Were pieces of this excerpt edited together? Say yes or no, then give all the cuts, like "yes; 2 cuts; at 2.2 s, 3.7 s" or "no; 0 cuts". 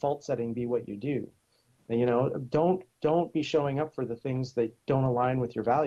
no; 0 cuts